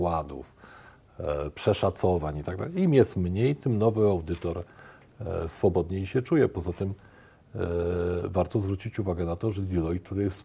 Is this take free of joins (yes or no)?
yes